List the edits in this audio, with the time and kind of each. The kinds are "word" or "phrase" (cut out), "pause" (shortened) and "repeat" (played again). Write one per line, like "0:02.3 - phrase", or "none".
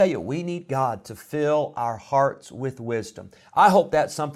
none

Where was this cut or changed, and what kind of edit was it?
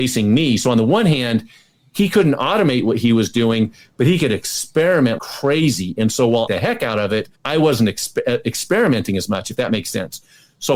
0:05.2 - word
0:06.5 - phrase
0:07.3 - pause

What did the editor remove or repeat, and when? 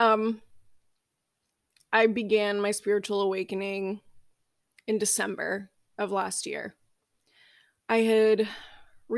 none

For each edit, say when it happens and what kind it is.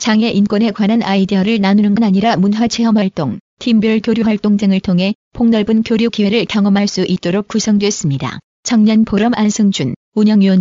0:02.0 - word
0:08.5 - pause

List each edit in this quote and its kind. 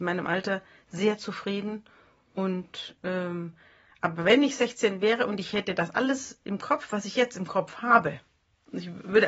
0:03.0 - pause

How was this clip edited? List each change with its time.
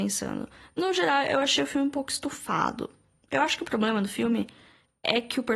none

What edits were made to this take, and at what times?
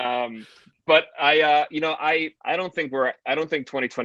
0:02.4 - pause

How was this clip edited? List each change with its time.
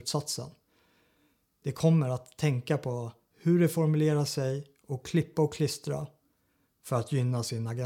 none

